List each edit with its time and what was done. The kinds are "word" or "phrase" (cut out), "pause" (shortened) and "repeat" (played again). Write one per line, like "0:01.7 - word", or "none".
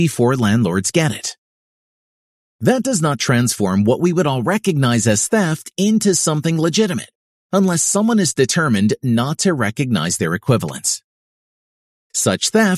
none

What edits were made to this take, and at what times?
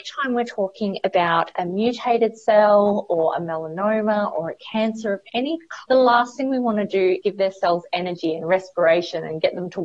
0:05.8 - word
0:07.2 - word

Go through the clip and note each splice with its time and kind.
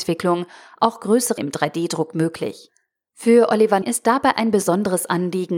0:01.4 - word
0:03.8 - word

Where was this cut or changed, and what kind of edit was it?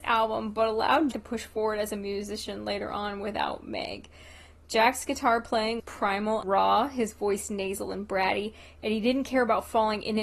0:01.1 - word
0:05.8 - word
0:06.4 - word

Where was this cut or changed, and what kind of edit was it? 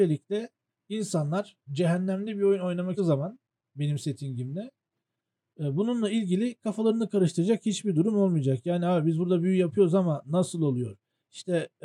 0:03.0 - word

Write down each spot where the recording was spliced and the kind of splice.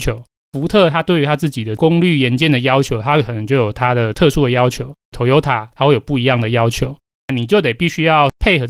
0:05.0 - pause

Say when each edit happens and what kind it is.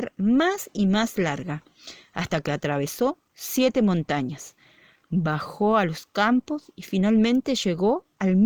none

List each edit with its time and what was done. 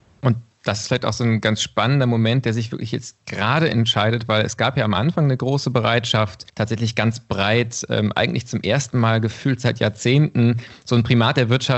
0:06.5 - pause

